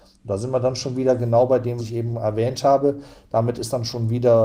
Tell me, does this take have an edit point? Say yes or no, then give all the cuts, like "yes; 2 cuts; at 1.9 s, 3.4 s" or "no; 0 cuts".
yes; 1 cut; at 1.8 s